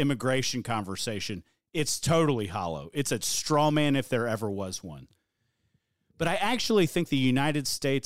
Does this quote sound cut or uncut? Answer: uncut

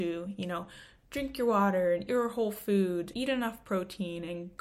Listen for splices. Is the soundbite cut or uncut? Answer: cut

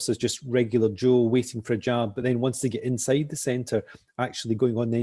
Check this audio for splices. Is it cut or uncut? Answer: uncut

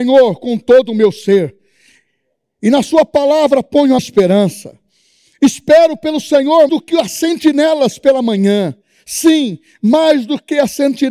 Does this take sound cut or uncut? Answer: cut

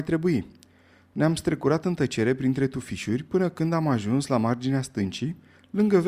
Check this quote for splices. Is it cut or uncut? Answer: uncut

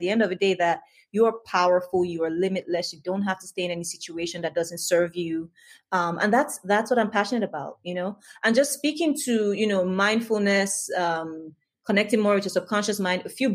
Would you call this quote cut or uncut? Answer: uncut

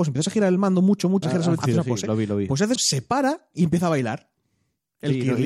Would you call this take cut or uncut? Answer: cut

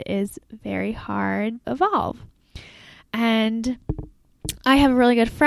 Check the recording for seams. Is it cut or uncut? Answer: cut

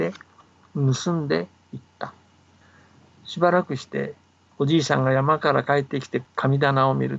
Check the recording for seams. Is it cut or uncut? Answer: uncut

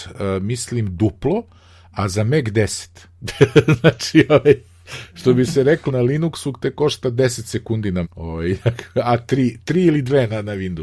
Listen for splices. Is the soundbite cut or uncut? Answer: cut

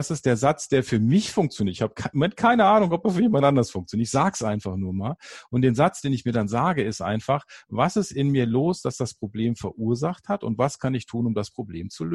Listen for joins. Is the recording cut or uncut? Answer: uncut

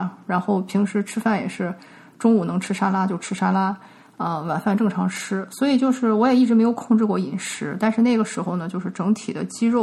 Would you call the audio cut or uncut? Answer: uncut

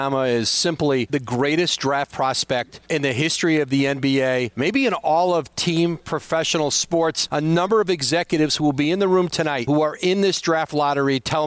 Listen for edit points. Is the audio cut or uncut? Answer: uncut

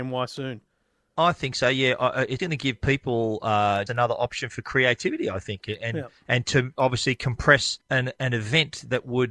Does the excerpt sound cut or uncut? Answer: cut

